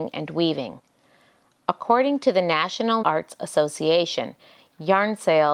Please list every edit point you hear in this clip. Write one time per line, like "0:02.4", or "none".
0:03.0